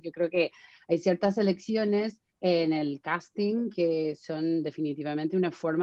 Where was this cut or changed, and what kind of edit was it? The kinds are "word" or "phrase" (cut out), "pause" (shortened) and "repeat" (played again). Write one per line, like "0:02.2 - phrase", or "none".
0:02.3 - pause